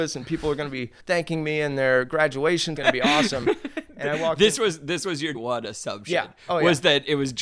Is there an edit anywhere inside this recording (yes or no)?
yes